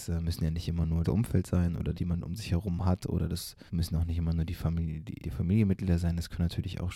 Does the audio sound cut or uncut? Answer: cut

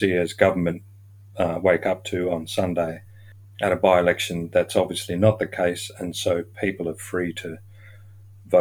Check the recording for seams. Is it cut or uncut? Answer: uncut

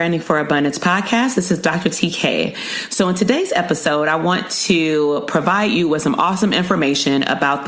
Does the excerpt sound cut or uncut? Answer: uncut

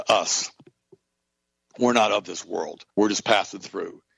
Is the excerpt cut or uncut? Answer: cut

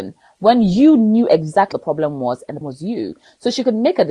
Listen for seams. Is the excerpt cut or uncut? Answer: cut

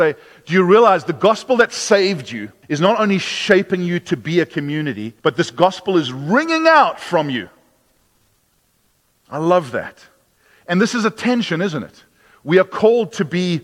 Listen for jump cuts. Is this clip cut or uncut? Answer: cut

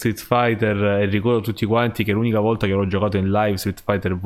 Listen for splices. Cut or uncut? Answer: uncut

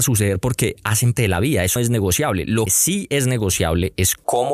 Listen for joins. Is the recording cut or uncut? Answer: cut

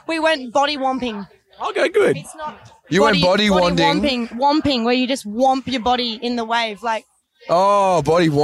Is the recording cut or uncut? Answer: uncut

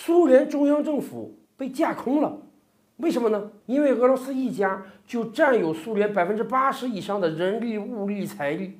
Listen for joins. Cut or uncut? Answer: cut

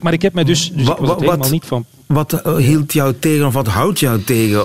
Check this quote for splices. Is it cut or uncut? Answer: uncut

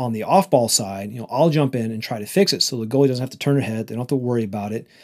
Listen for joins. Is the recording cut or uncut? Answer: uncut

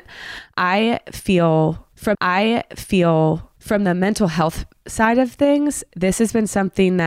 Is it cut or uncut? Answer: cut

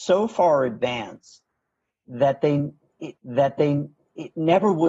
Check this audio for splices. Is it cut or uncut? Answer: cut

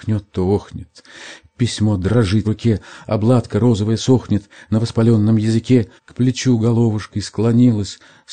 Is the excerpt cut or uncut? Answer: cut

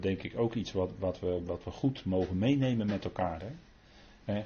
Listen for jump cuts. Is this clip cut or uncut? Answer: uncut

